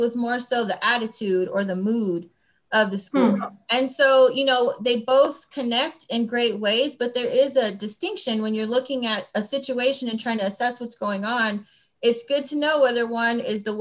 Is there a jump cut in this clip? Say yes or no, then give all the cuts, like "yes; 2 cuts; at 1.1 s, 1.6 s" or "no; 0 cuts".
no; 0 cuts